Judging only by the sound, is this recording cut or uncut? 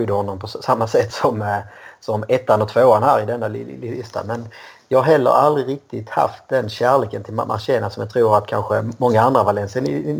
uncut